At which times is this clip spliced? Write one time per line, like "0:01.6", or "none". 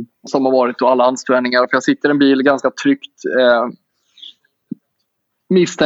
none